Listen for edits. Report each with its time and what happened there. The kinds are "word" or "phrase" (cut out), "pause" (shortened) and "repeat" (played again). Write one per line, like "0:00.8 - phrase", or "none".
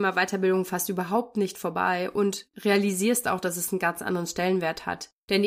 none